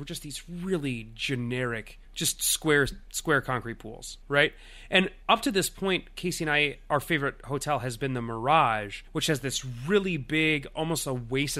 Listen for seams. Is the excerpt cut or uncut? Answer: cut